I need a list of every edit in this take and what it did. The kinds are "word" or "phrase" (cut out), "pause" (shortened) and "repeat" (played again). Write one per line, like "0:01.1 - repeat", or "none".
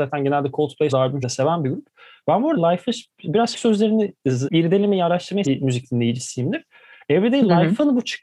0:00.9 - word
0:01.2 - word
0:02.6 - word
0:03.5 - word
0:04.5 - word
0:05.4 - word

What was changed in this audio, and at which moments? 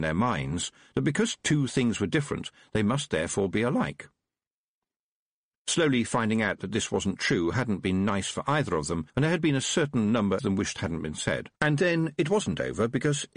0:09.1 - pause
0:10.4 - phrase
0:11.6 - pause

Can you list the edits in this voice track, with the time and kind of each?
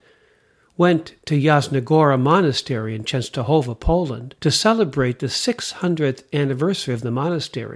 0:04.4 - pause

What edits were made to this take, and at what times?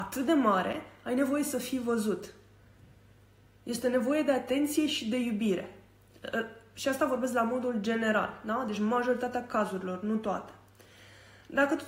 none

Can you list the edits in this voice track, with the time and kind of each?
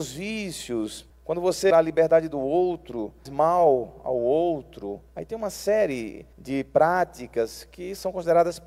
0:01.1 - pause
0:01.7 - phrase
0:03.3 - word
0:05.1 - pause
0:06.3 - pause

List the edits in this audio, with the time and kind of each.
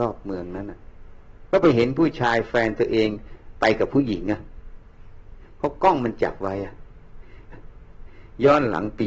0:07.5 - repeat

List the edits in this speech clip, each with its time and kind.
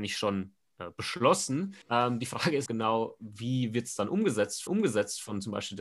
0:01.8 - pause
0:02.7 - word
0:04.7 - repeat

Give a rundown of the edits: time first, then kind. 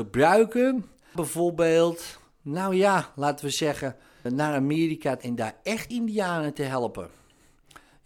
0:01.2 - word
0:04.3 - word
0:05.2 - word
0:05.9 - word

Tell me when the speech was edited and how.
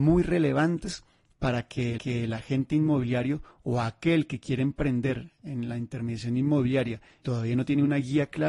0:02.0 - repeat
0:07.2 - word

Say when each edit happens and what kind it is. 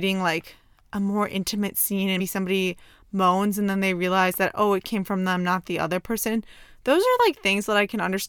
0:02.2 - word

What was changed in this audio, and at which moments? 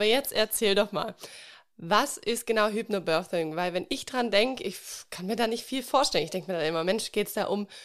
none

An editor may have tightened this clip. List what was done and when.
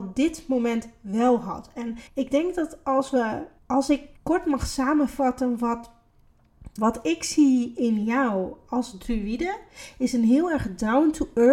0:02.1 - pause
0:03.6 - pause
0:04.2 - pause
0:06.8 - word

